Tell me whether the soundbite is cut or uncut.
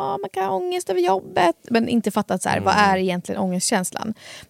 uncut